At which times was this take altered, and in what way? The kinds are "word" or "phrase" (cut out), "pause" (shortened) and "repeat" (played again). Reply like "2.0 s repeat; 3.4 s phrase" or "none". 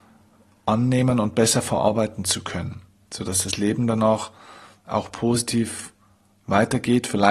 none